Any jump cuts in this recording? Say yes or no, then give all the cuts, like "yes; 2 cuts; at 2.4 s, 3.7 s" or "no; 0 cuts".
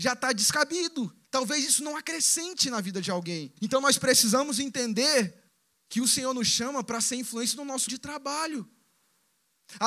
yes; 4 cuts; at 1.2 s, 3.6 s, 5.5 s, 7.9 s